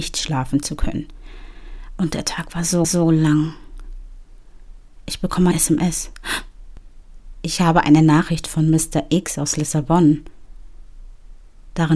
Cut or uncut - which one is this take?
cut